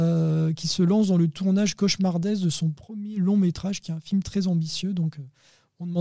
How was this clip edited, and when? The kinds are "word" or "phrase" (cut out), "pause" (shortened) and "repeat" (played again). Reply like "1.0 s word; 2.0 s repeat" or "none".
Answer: none